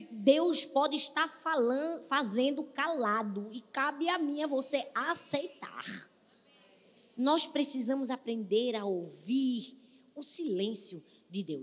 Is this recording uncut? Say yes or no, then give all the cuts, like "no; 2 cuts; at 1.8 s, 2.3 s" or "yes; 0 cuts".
yes; 0 cuts